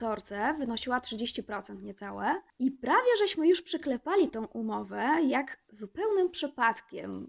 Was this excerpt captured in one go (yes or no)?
yes